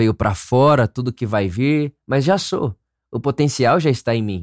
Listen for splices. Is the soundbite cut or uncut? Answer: uncut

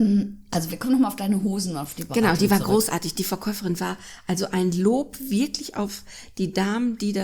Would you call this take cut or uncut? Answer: uncut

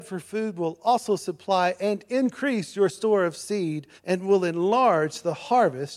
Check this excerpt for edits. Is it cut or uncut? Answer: cut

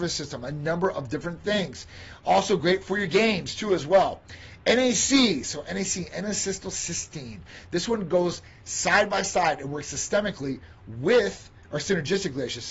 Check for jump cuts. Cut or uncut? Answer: uncut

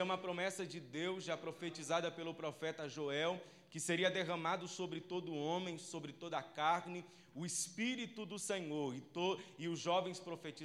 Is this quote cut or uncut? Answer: uncut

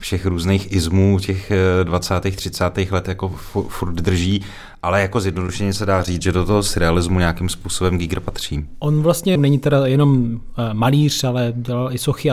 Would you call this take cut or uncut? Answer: cut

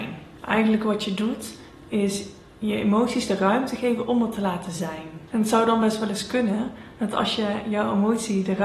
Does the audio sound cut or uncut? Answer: uncut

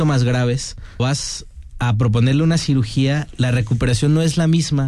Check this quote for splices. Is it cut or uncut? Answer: cut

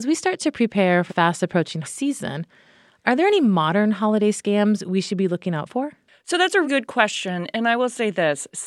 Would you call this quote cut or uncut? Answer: cut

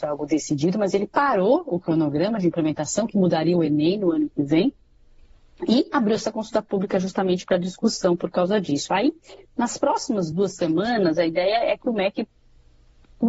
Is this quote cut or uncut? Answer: uncut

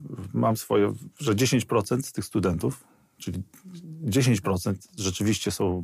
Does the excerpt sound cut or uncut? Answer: uncut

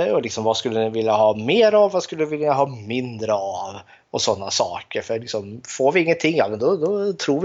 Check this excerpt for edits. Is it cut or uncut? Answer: uncut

